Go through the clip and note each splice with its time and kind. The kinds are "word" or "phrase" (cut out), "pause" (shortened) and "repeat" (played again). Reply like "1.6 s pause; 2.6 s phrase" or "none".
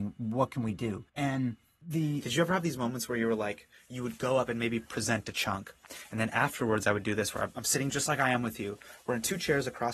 1.1 s pause; 7.9 s word